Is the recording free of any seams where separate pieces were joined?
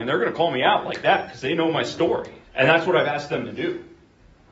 no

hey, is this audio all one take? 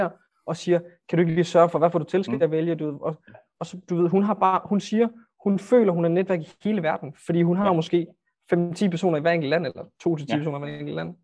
yes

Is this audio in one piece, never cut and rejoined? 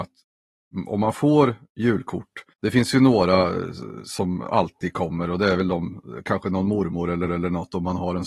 no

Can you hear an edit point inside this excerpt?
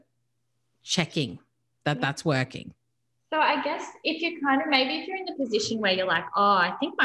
no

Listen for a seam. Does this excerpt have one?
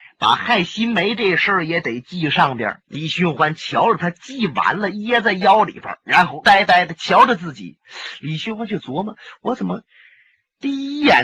yes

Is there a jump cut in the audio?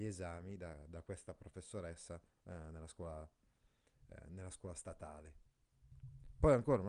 no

